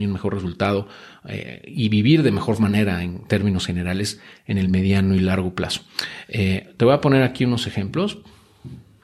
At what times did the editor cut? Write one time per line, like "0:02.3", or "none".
none